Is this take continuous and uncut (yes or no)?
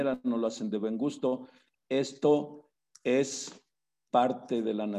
yes